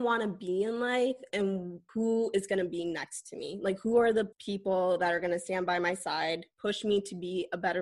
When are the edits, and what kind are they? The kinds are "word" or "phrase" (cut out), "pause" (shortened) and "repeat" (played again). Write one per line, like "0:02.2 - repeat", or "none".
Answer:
0:01.9 - pause
0:04.3 - pause